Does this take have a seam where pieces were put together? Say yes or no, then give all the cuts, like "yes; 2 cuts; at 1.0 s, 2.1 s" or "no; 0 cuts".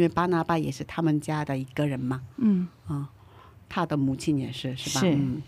no; 0 cuts